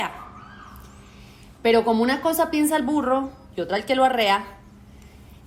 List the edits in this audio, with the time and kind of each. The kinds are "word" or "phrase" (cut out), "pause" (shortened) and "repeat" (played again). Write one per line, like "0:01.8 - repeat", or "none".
none